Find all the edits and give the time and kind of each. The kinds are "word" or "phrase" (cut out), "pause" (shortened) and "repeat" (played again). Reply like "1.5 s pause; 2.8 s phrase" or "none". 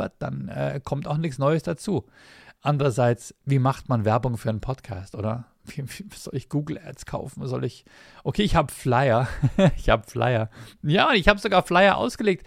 none

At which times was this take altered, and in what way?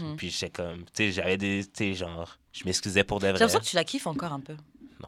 2.5 s pause

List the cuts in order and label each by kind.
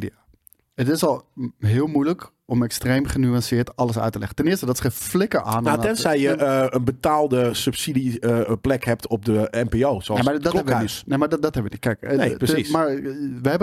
none

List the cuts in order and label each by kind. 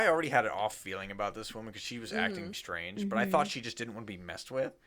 2.5 s word

